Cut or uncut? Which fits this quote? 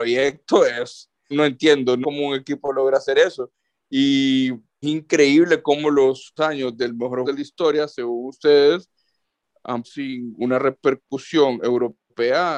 cut